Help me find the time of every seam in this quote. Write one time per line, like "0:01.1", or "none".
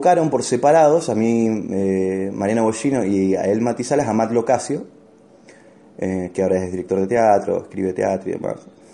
none